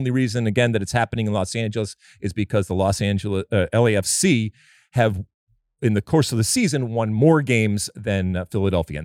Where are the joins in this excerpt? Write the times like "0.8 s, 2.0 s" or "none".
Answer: none